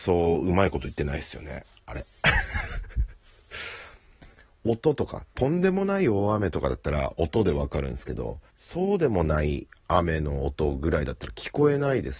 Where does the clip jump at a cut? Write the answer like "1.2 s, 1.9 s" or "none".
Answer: 8.5 s

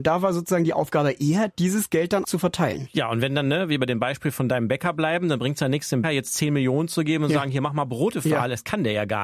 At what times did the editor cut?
2.2 s, 6.0 s

